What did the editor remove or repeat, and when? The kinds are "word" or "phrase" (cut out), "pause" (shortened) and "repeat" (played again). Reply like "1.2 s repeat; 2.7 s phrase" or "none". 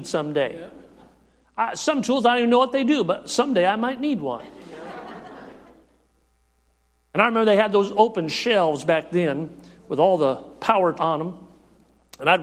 10.9 s word